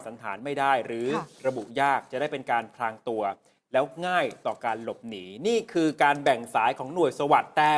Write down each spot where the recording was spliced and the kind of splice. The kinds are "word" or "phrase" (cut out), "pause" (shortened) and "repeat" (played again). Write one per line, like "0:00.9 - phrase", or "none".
none